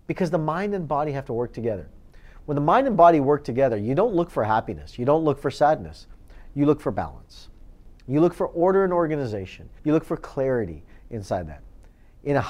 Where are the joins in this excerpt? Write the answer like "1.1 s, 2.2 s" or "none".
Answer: 9.8 s